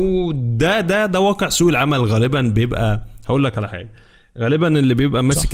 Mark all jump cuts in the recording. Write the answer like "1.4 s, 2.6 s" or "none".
none